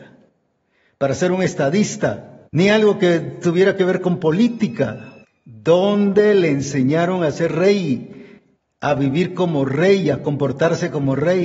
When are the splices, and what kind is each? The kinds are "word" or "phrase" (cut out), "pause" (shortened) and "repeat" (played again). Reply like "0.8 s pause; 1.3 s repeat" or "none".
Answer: 2.4 s pause; 5.2 s pause; 8.5 s pause